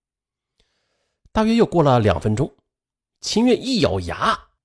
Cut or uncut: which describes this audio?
uncut